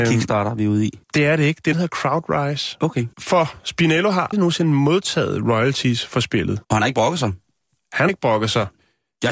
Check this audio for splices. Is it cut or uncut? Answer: cut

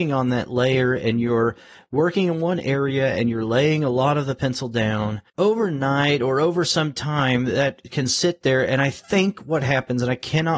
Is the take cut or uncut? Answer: cut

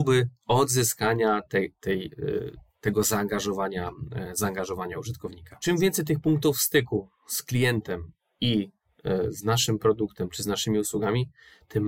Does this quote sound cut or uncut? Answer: uncut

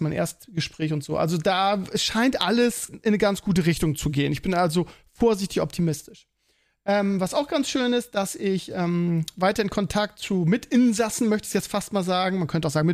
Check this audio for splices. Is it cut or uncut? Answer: uncut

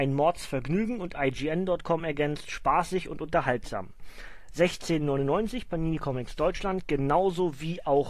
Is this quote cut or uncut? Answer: uncut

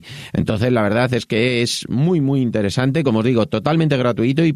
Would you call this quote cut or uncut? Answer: uncut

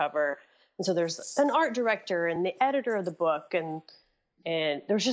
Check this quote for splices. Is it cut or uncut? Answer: uncut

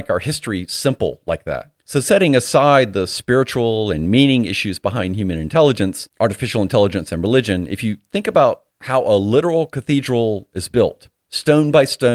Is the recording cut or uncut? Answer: cut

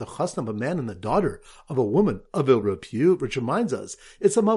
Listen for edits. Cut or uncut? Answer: uncut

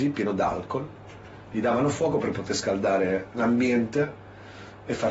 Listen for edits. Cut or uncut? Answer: uncut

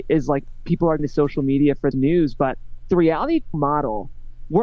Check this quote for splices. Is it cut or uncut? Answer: cut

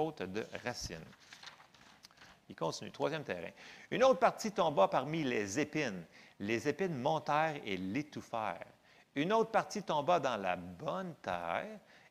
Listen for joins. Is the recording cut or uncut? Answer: uncut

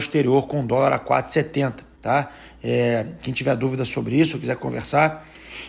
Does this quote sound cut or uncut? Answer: cut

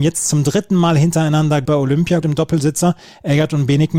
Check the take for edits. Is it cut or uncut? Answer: cut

